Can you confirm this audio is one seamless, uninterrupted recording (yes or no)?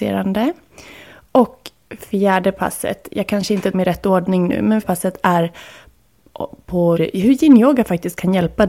no